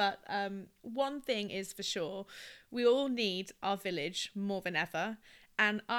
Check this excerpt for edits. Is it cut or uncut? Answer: uncut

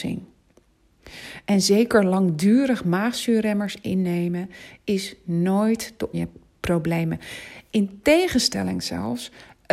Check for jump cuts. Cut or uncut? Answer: cut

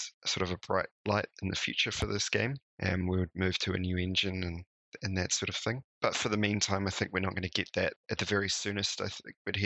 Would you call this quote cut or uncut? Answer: cut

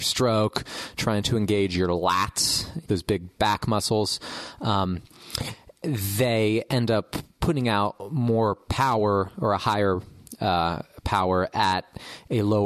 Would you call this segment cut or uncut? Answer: cut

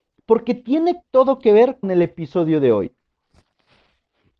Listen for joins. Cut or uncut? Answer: cut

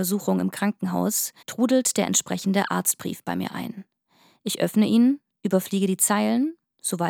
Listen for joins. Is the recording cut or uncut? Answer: cut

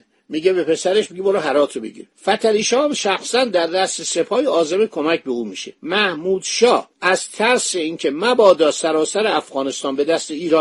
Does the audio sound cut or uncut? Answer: cut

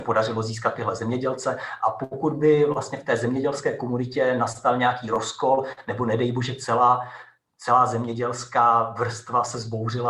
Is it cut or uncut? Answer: uncut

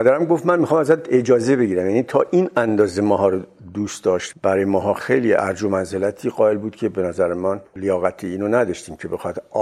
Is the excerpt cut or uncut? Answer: cut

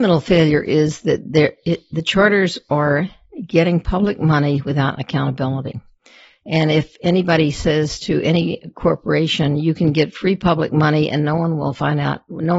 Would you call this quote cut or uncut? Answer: uncut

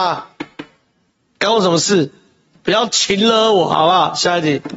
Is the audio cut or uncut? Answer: uncut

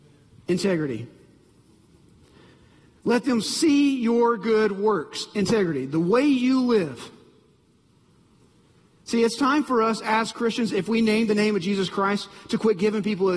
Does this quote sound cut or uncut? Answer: uncut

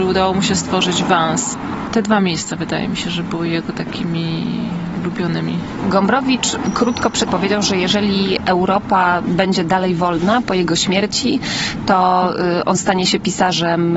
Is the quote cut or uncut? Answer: cut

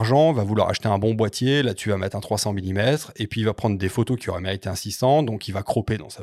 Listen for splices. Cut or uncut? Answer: uncut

